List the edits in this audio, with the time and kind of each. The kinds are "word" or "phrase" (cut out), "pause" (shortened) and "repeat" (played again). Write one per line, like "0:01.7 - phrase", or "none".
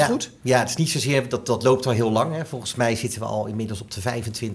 none